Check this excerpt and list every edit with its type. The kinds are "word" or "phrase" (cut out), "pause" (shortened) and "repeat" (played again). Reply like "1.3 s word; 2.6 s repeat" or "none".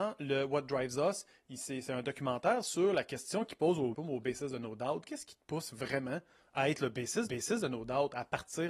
3.9 s phrase; 7.3 s repeat